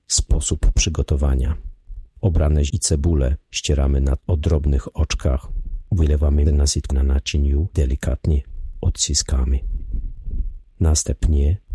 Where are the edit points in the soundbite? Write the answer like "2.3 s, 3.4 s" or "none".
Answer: 2.7 s, 4.2 s, 6.5 s, 6.9 s, 7.7 s